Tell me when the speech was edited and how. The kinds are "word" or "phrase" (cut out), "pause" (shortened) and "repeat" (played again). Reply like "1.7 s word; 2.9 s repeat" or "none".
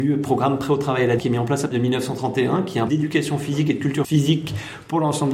1.2 s word; 1.7 s word; 2.9 s word; 4.0 s word

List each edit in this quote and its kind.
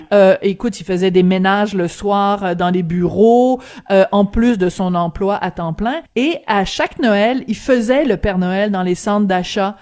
6.1 s pause

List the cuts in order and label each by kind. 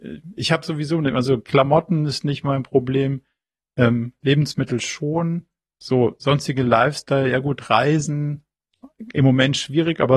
none

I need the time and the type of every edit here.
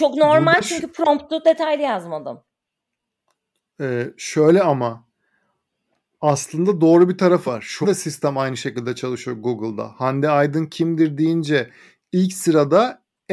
7.5 s word; 7.8 s word

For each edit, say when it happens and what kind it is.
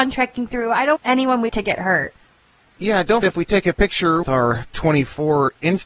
1.0 s word; 1.5 s word; 3.2 s word; 4.2 s word; 4.7 s word

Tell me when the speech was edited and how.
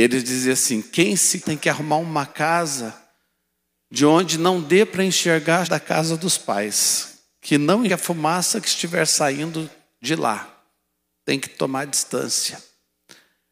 1.4 s word; 5.6 s word; 7.9 s word

